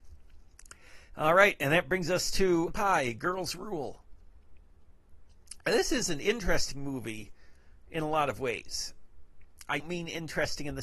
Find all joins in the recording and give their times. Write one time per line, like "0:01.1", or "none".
0:02.7
0:09.8